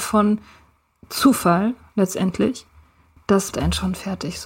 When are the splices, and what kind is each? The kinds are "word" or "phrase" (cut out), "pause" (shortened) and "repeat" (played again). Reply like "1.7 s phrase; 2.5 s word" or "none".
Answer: 3.5 s word